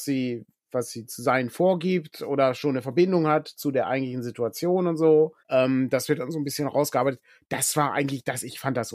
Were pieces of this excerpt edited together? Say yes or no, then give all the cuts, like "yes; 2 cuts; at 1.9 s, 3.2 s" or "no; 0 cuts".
yes; 1 cut; at 5.4 s